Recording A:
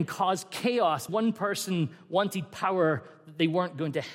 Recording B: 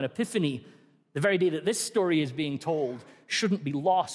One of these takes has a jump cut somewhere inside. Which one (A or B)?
A